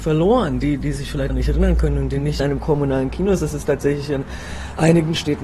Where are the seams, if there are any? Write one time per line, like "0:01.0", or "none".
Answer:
0:01.3
0:02.4